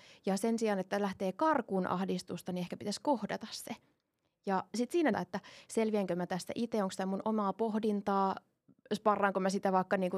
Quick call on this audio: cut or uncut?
cut